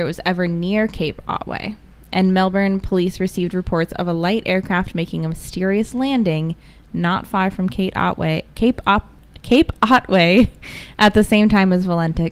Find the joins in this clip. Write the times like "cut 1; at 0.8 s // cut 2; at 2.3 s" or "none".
none